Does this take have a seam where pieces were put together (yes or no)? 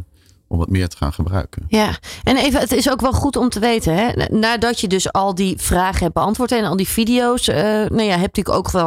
no